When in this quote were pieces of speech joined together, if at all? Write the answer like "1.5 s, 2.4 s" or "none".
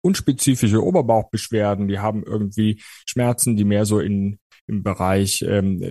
none